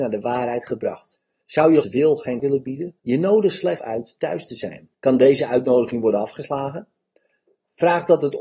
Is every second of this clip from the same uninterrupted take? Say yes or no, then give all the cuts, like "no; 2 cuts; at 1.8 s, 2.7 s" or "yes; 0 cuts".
no; 6 cuts; at 1.2 s, 1.8 s, 2.4 s, 3.0 s, 3.8 s, 4.9 s